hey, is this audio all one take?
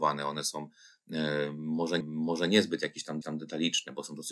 no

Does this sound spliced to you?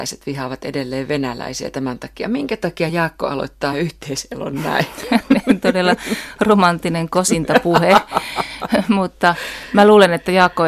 no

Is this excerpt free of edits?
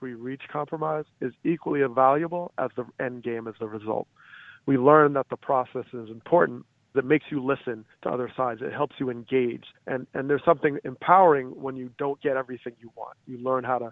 no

